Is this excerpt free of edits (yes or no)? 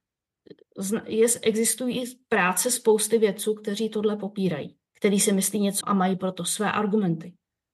no